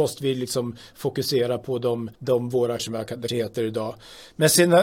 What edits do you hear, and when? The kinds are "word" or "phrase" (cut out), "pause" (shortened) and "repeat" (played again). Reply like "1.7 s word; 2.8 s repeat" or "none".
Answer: 2.1 s pause; 2.8 s word; 3.3 s word